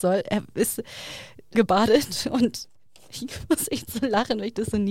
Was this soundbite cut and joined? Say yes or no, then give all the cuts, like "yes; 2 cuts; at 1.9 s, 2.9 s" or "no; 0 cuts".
yes; 2 cuts; at 1.5 s, 2.6 s